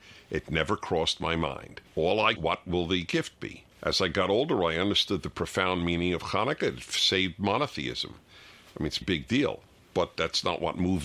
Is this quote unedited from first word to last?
no; 4 cuts; at 1.9 s, 2.4 s, 3.7 s, 9.0 s

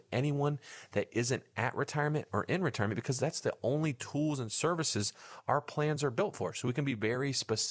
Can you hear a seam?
no; 0 cuts

